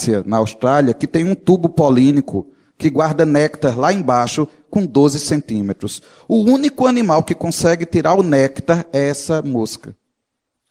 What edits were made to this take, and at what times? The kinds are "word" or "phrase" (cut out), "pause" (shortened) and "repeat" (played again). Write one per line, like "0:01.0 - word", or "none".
none